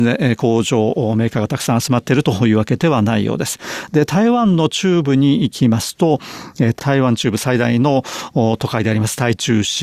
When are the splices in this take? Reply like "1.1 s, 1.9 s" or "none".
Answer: 6.8 s